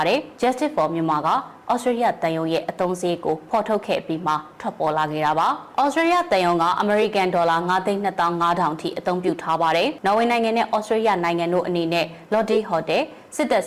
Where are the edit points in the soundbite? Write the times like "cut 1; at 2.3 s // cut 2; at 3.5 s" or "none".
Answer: none